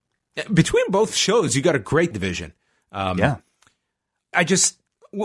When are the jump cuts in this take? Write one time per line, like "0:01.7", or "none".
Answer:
0:02.1
0:04.3